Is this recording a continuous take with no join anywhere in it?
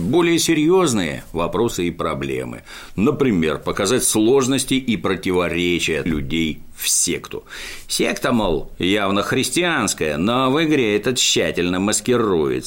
no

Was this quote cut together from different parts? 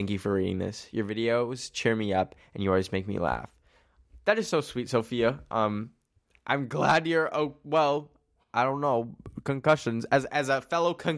no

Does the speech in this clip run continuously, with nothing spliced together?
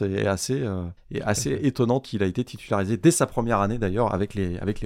no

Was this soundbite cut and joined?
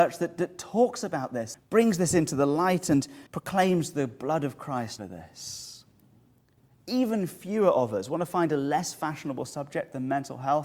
yes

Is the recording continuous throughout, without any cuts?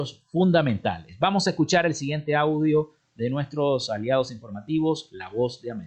yes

